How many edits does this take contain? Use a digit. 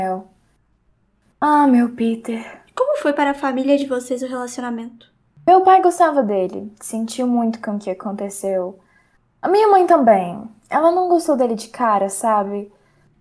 0